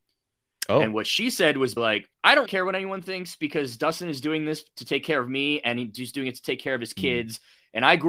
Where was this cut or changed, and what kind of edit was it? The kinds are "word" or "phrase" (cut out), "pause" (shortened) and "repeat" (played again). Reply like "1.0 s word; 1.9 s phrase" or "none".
1.8 s word; 2.1 s pause; 2.5 s word